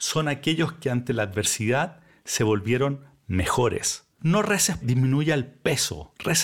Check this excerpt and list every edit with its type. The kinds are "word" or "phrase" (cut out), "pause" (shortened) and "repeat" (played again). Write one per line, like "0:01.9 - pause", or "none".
0:04.1 - pause
0:04.8 - word

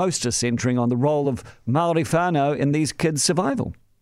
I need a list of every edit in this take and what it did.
none

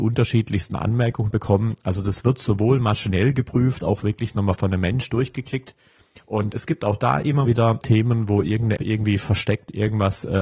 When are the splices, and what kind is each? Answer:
0:01.3 - word
0:03.8 - word
0:06.5 - word
0:07.4 - word
0:07.8 - word
0:08.8 - word

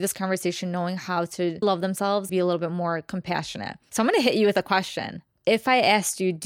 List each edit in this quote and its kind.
0:01.6 - word
0:02.3 - phrase

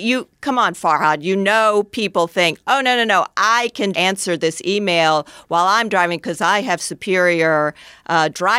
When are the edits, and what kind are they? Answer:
0:03.9 - word

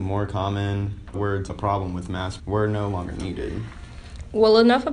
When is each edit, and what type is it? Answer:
0:01.1 - word
0:01.5 - word
0:02.4 - word

